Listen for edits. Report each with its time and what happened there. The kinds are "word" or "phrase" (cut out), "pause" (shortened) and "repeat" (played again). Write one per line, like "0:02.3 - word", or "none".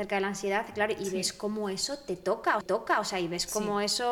0:02.6 - repeat